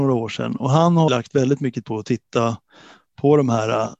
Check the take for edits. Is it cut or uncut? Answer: cut